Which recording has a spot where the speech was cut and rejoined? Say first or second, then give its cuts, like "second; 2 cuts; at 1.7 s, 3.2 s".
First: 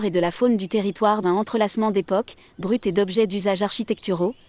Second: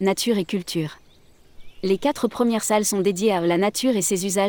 first; 2 cuts; at 1.2 s, 2.6 s